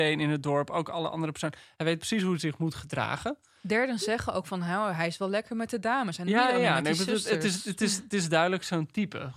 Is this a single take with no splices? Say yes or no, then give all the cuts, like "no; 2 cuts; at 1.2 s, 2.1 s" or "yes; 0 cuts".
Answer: yes; 0 cuts